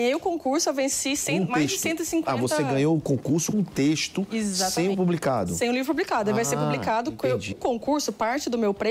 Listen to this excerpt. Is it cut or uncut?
cut